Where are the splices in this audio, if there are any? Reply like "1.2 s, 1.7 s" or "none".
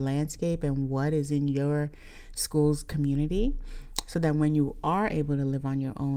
none